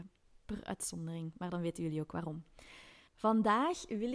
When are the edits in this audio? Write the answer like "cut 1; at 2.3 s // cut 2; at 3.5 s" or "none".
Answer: cut 1; at 3.1 s